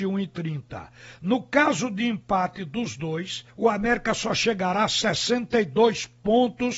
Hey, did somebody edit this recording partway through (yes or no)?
yes